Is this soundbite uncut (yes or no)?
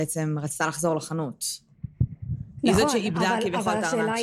yes